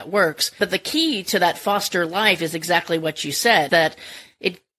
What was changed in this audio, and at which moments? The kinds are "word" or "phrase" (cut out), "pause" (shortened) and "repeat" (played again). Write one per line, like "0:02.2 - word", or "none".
0:03.7 - word